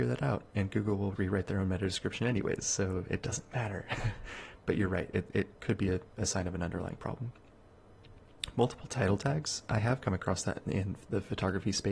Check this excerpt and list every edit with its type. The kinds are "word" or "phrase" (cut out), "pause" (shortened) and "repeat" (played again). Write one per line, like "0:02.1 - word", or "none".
0:01.2 - word
0:04.6 - word